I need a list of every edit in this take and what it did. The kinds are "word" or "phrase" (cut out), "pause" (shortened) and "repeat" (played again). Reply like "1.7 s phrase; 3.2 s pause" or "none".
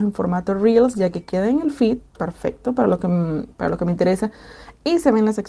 none